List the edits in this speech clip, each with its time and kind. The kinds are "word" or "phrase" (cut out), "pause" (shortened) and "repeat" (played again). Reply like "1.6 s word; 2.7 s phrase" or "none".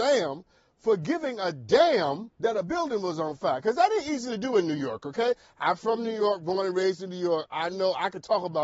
2.3 s pause

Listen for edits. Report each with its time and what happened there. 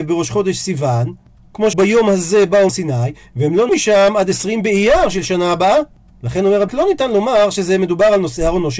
1.7 s word; 2.7 s word; 3.7 s word; 6.7 s word

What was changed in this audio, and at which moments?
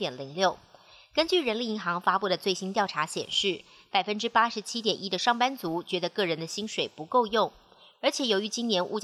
none

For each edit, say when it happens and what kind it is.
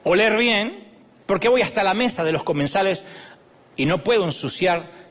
none

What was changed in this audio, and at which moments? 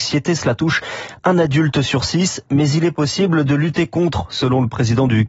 none

